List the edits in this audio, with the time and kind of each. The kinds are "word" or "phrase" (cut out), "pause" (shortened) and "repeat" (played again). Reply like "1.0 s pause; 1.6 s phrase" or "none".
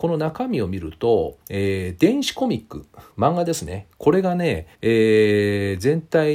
1.4 s pause; 3.1 s pause; 4.7 s pause